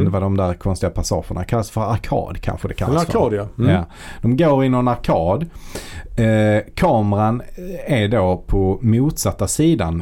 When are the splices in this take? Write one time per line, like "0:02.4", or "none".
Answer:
none